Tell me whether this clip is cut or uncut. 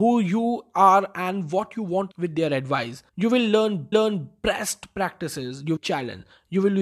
cut